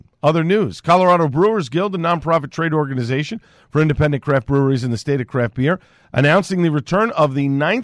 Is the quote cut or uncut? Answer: uncut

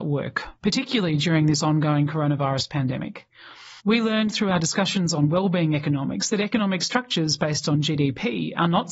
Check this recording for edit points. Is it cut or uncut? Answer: cut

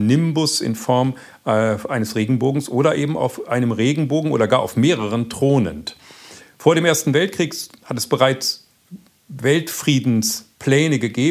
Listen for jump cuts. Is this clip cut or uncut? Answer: uncut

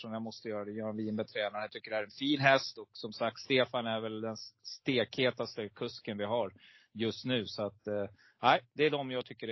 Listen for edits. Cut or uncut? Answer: uncut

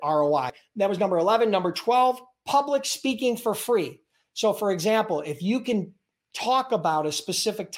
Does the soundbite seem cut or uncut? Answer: uncut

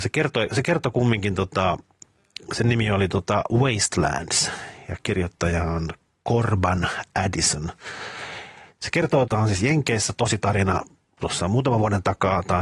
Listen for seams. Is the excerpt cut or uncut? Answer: cut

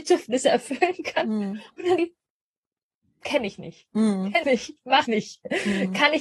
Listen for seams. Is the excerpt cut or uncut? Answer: cut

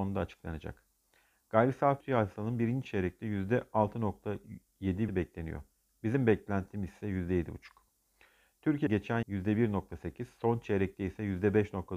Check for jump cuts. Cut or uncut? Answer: cut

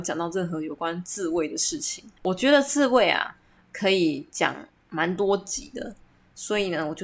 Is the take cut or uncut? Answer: cut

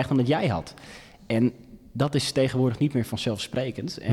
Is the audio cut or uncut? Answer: uncut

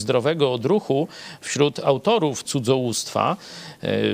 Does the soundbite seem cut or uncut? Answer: cut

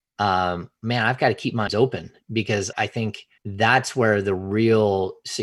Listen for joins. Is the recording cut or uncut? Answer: cut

